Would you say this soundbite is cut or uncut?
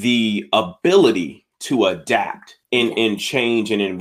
cut